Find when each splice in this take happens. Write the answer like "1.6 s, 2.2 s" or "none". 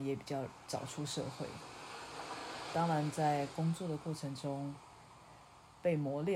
2.7 s